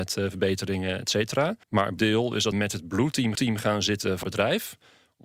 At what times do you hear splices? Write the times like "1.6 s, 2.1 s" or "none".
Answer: 1.6 s, 2.0 s, 2.5 s, 3.3 s, 4.2 s